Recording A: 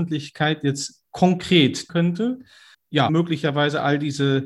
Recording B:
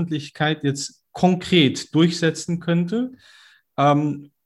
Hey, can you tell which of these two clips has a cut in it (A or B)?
A